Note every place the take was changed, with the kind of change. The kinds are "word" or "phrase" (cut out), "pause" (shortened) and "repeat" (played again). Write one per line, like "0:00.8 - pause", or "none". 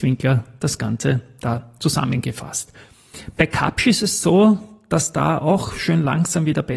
none